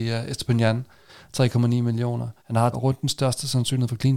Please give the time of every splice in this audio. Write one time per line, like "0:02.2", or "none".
0:02.4
0:02.7